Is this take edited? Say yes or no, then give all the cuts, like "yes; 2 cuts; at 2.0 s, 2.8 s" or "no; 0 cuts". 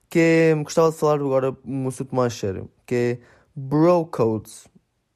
no; 0 cuts